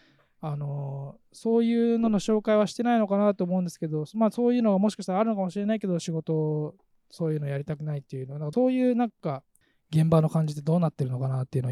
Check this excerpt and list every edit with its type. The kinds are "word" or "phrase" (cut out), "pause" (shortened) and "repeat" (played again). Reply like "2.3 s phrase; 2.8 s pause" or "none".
none